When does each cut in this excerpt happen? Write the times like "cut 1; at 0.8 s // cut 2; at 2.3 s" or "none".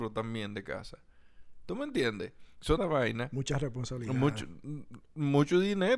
cut 1; at 2.8 s